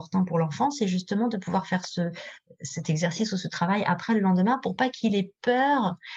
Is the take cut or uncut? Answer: uncut